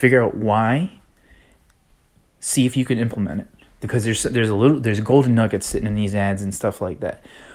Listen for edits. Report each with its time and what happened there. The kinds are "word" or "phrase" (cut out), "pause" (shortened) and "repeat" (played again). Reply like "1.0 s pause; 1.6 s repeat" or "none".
none